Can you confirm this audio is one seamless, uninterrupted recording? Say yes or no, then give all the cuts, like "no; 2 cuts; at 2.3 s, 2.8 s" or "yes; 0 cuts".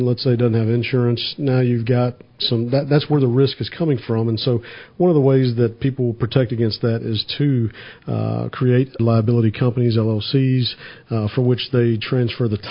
no; 1 cut; at 9.0 s